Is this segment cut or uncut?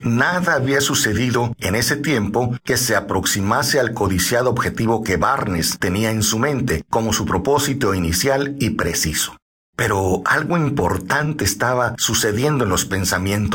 uncut